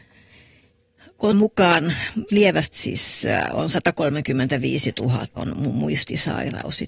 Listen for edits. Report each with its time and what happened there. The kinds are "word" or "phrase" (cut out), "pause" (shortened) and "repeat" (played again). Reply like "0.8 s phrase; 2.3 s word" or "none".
1.3 s word; 2.3 s word; 2.7 s word; 5.4 s word

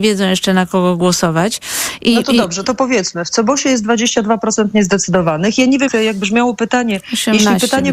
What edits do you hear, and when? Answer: 5.9 s word

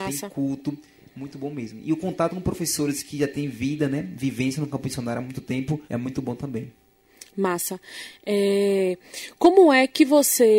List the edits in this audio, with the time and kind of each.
5.9 s pause

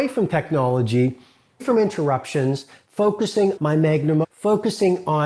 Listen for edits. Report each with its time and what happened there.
1.6 s word; 3.6 s word; 4.2 s word

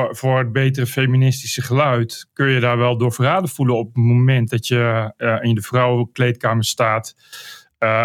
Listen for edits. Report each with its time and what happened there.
none

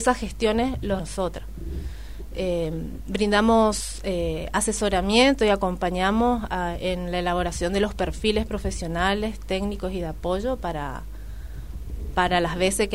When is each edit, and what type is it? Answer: 1.0 s word

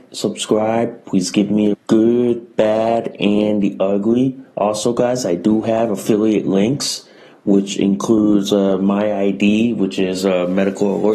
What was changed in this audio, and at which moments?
1.7 s phrase

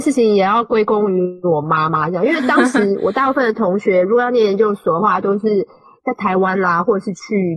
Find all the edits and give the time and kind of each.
none

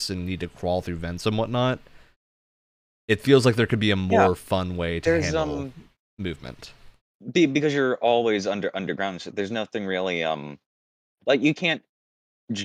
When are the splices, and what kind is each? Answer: none

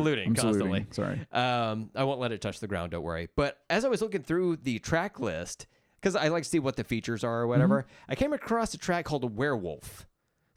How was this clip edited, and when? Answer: none

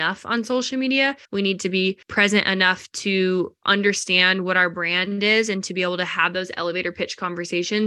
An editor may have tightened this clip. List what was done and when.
1.2 s pause; 2.0 s pause

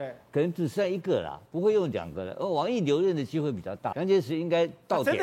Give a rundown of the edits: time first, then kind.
3.9 s word

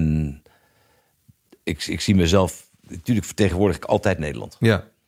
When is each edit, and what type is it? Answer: 2.8 s pause

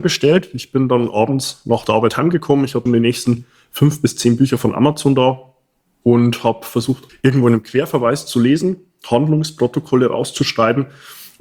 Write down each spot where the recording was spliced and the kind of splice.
2.9 s word; 7.1 s word

